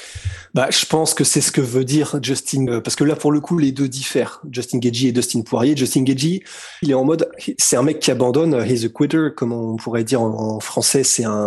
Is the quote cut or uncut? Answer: cut